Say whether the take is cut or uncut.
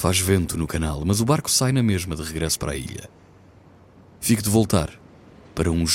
uncut